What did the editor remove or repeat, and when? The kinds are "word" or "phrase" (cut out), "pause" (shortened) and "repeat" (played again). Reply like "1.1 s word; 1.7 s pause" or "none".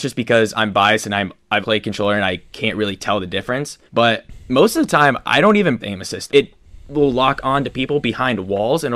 1.6 s word; 3.9 s pause; 5.8 s phrase; 6.3 s phrase